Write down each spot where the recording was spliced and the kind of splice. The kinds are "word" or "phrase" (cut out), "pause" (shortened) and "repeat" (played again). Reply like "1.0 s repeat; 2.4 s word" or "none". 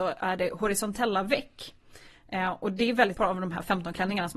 3.1 s word